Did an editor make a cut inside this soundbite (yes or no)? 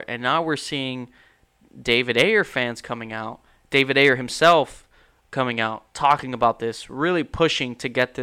no